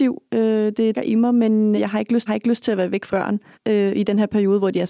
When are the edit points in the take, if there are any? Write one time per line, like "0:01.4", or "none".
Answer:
0:00.9
0:01.8
0:02.3
0:03.1
0:03.5